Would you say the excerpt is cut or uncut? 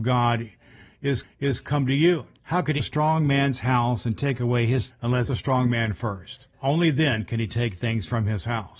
cut